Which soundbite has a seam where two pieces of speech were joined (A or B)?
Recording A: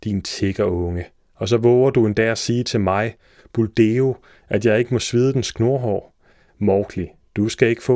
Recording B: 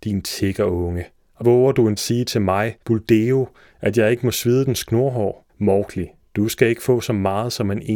B